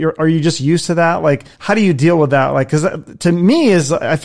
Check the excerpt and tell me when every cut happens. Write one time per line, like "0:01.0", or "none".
0:01.5

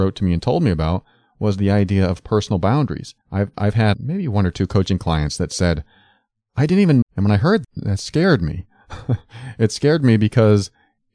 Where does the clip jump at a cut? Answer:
0:03.2
0:03.9
0:07.0
0:07.6

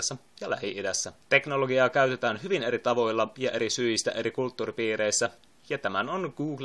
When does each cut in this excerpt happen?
0:01.2

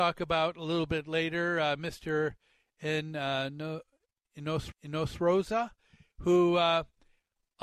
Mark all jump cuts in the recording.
0:04.7

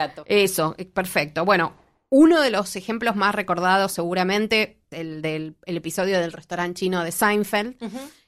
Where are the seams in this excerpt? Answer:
0:04.9

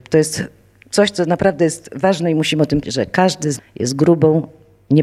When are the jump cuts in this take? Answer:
0:02.8
0:03.6

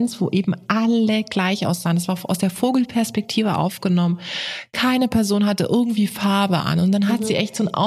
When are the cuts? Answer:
none

